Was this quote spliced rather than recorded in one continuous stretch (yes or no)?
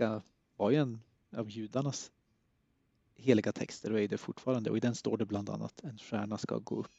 no